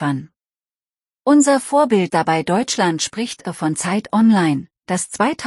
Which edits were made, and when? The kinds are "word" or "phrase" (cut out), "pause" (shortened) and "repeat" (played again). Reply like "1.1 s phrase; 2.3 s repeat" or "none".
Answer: 2.1 s word